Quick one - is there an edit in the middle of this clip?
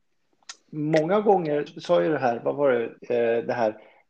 yes; 2 cuts; at 1.7 s, 3.0 s

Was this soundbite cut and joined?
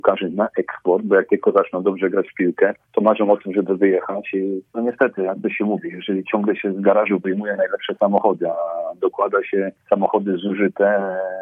yes; 3 cuts; at 2.8 s, 4.7 s, 9.8 s

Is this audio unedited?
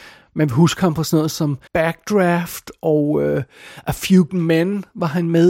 no; 2 cuts; at 1.7 s, 4.3 s

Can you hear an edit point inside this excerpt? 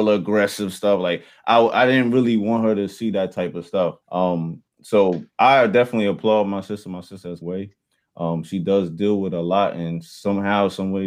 yes; 3 cuts; at 4.0 s, 5.3 s, 7.4 s

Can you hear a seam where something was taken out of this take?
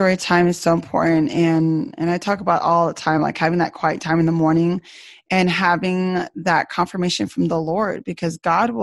no; 0 cuts

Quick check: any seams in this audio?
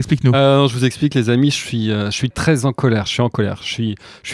yes; 1 cut; at 2.3 s

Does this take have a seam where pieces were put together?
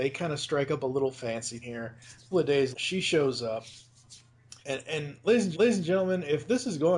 yes; 5 cuts; at 1.6 s, 2.3 s, 2.7 s, 4.6 s, 5.5 s

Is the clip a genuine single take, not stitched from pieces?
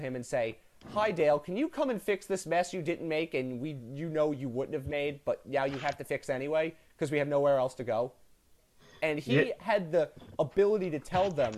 yes; 0 cuts

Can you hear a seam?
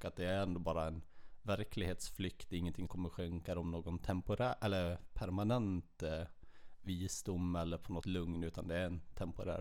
yes; 2 cuts; at 2.9 s, 8.0 s

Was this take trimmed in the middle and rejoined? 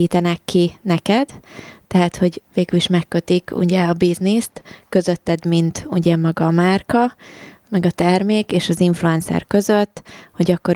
yes; 1 cut; at 2.4 s

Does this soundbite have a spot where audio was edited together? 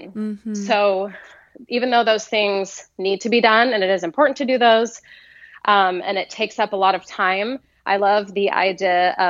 no; 0 cuts

